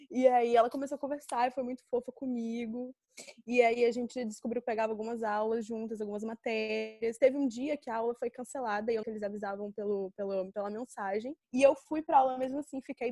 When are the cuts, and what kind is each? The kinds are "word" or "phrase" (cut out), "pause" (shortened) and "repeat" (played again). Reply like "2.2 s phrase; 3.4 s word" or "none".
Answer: 9.0 s phrase; 11.4 s pause